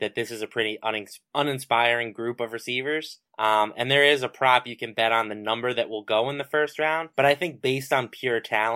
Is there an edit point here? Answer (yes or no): yes